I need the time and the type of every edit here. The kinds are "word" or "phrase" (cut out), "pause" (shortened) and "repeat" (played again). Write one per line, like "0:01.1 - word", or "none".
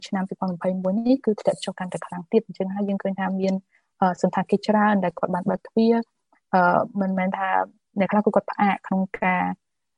none